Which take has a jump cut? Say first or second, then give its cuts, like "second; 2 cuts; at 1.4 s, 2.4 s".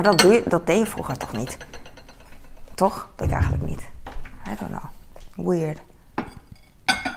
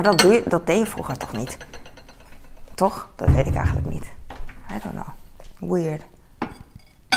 first; 1 cut; at 3.2 s